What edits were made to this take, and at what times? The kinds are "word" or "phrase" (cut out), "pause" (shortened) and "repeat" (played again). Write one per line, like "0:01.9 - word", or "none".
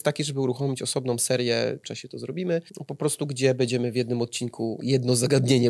0:01.8 - phrase
0:02.7 - pause

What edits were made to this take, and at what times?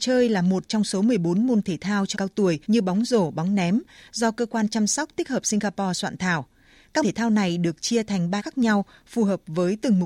0:02.1 - word
0:02.6 - pause
0:07.0 - word
0:08.4 - word

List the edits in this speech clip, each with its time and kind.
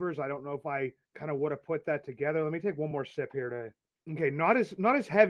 none

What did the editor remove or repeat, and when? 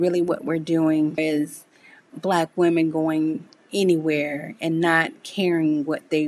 0:01.2 - word
0:02.1 - word

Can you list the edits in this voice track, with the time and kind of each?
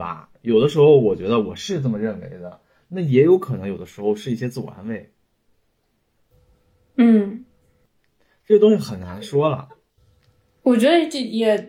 none

